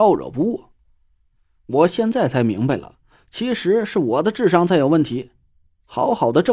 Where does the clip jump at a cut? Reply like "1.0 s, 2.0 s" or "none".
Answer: none